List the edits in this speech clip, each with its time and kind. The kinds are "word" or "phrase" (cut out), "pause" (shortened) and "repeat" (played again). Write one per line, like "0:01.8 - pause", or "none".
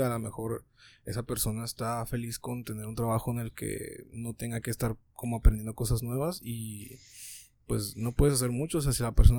none